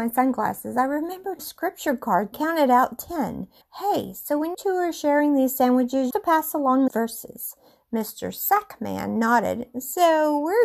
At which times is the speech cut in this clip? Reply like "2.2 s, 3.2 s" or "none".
1.4 s, 2.3 s, 3.6 s, 4.5 s, 6.1 s, 6.9 s

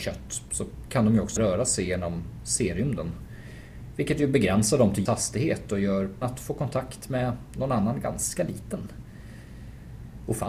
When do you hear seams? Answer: 1.4 s, 5.1 s, 6.2 s

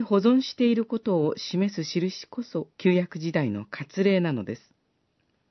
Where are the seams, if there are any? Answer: 2.7 s

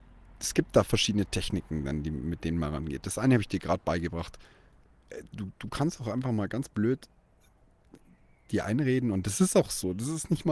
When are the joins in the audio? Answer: none

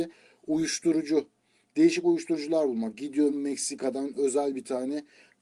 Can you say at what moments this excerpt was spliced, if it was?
3.3 s

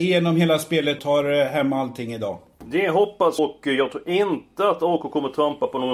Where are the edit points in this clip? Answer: 1.0 s, 3.4 s

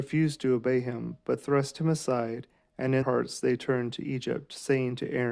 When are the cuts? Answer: 3.0 s

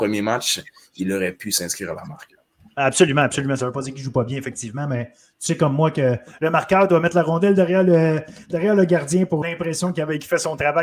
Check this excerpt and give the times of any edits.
9.4 s

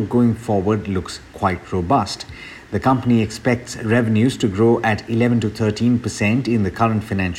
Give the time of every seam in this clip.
none

